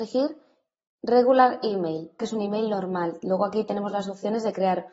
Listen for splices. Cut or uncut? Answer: cut